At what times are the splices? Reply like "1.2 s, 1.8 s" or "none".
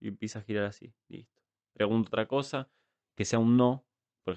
none